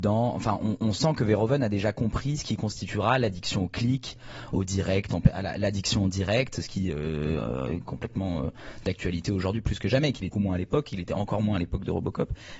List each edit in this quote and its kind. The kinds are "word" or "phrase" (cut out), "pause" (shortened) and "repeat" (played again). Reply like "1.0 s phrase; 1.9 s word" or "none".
10.3 s word